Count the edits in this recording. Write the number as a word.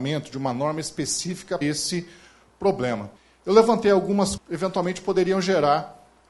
three